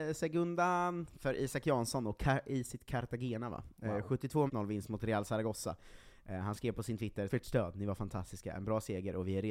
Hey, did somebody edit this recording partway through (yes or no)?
yes